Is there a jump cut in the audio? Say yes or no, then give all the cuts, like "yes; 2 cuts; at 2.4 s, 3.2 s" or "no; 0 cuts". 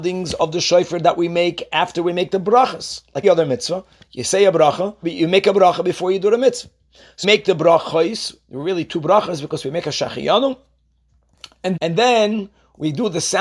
yes; 4 cuts; at 3.2 s, 5.0 s, 7.2 s, 11.8 s